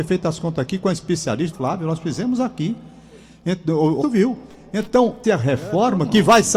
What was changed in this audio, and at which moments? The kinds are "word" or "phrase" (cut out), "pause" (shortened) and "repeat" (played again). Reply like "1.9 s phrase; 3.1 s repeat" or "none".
1.5 s phrase; 4.0 s word; 5.2 s word